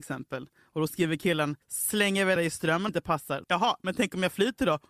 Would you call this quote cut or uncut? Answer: cut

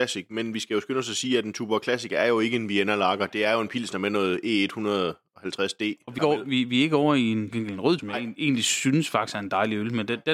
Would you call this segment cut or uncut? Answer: cut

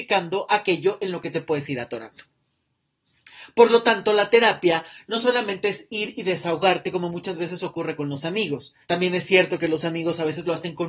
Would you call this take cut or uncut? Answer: cut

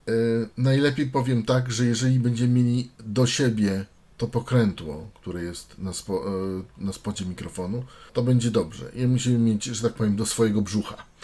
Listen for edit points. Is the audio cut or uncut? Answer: cut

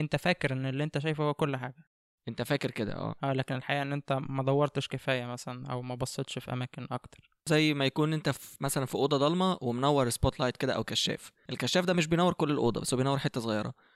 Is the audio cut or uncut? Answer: uncut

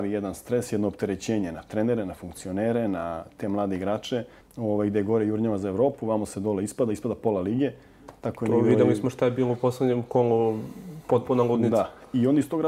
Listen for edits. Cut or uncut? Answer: cut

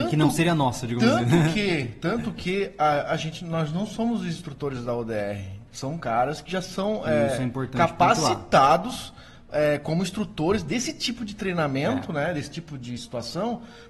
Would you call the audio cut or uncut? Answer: uncut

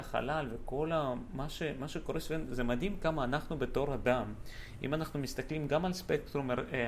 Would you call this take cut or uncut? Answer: uncut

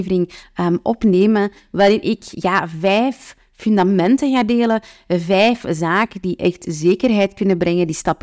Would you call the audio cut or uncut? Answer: uncut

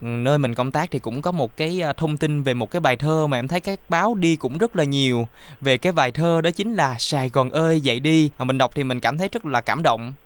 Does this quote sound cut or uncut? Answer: cut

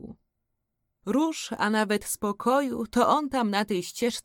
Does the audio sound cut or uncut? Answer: uncut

